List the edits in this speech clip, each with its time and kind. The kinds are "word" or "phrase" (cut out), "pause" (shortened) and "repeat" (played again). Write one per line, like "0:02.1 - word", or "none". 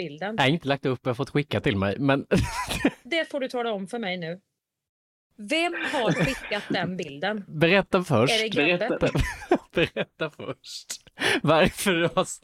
none